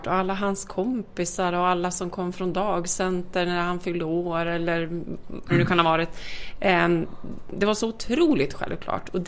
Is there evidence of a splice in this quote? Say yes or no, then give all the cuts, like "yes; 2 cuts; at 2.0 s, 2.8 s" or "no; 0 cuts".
yes; 1 cut; at 5.5 s